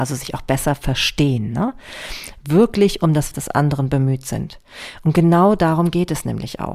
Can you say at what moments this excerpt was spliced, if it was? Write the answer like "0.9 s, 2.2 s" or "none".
3.3 s